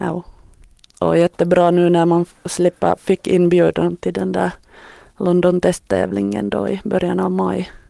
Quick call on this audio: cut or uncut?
uncut